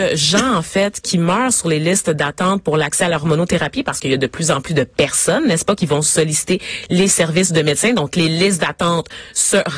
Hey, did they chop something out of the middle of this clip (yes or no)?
no